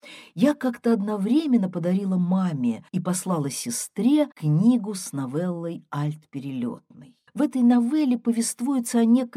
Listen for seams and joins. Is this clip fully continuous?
no; 3 cuts; at 2.9 s, 4.3 s, 7.3 s

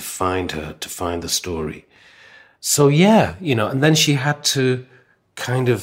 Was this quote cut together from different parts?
no; 0 cuts

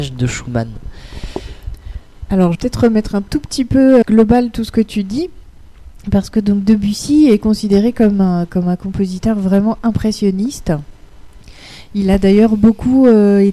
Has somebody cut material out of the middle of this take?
yes; 2 cuts; at 2.5 s, 4.0 s

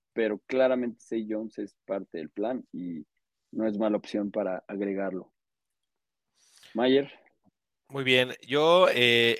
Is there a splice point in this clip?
no; 0 cuts

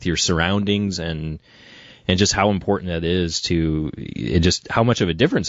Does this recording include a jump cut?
no; 0 cuts

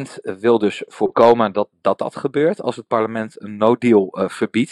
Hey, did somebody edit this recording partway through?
no; 0 cuts

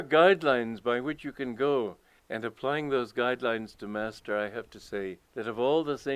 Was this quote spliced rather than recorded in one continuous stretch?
yes; 2 cuts; at 2.2 s, 5.2 s

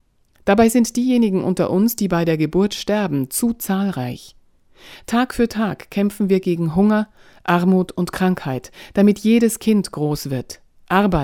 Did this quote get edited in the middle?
no; 0 cuts

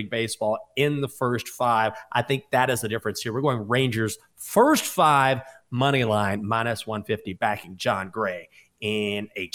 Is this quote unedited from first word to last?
yes; 0 cuts

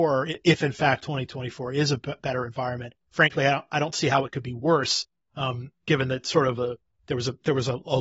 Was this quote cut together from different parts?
no; 0 cuts

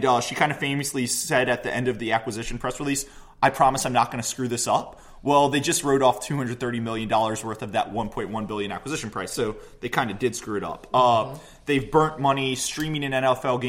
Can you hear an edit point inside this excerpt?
no; 0 cuts

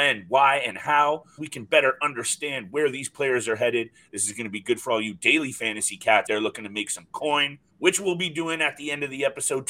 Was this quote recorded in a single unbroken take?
no; 3 cuts; at 1.4 s, 6.3 s, 7.7 s

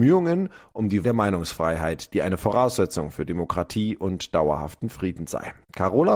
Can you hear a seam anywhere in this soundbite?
yes; 1 cut; at 1.0 s

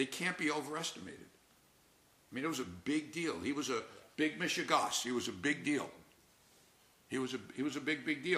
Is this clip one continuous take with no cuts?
yes; 0 cuts

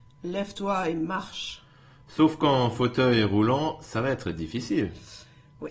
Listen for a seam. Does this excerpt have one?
no; 0 cuts

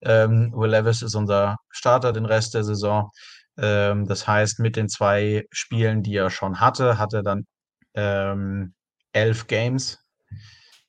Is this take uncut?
yes; 0 cuts

